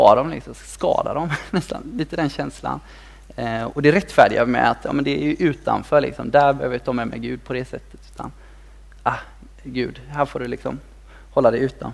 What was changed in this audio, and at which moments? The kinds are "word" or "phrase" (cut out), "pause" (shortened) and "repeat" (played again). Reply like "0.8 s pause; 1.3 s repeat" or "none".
none

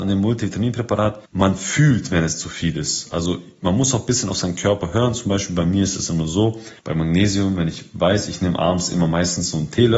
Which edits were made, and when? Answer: 1.3 s pause; 6.8 s pause

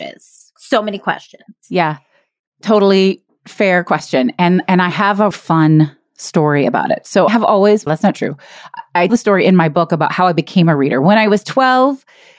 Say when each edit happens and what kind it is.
5.3 s word; 7.3 s word; 7.9 s word; 9.1 s word

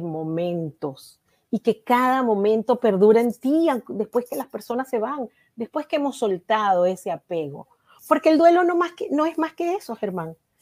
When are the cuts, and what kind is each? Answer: none

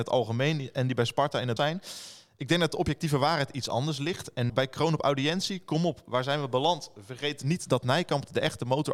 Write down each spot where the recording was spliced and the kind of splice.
1.6 s phrase; 4.5 s word

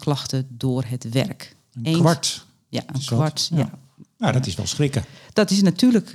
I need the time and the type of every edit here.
none

